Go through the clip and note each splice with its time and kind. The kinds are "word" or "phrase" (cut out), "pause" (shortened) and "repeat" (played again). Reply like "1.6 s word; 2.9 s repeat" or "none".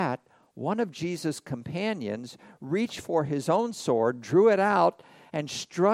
none